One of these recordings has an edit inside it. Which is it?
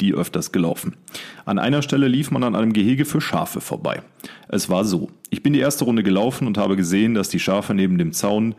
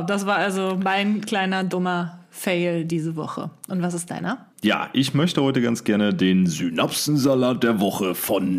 second; 1 cut; at 4.5 s

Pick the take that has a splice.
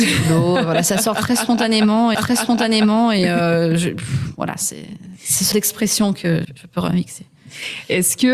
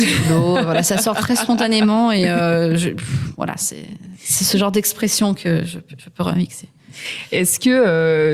first; 3 cuts; at 2.1 s, 5.5 s, 6.4 s

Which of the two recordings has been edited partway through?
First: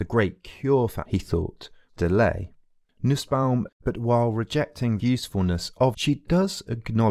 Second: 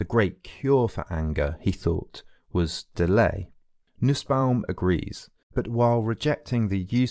first; 5 cuts; at 1.0 s, 1.9 s, 3.7 s, 5.0 s, 5.9 s

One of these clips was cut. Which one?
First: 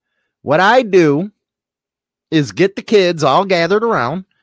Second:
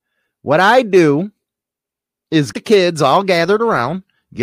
second; 1 cut; at 2.5 s

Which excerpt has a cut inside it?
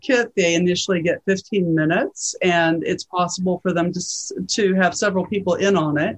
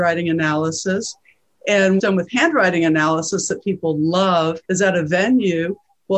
second; 2 cuts; at 2.0 s, 4.6 s

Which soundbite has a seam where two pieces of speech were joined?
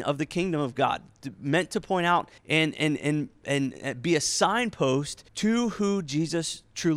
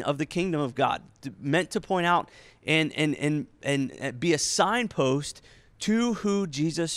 first; 2 cuts; at 2.4 s, 5.3 s

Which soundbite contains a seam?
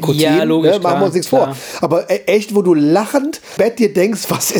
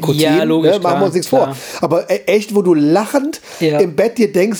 first; 1 cut; at 3.6 s

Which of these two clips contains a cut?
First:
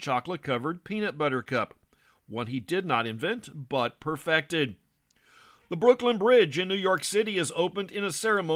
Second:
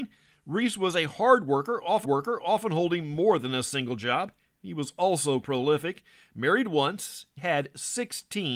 second; 3 cuts; at 2.0 s, 5.4 s, 7.4 s

